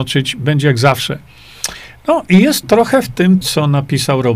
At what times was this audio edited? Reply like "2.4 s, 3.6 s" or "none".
2.6 s, 3.4 s